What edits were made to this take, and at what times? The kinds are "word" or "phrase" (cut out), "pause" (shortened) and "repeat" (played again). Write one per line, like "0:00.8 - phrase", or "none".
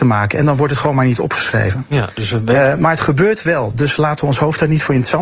none